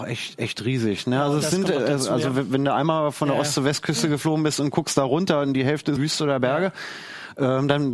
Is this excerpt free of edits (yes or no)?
no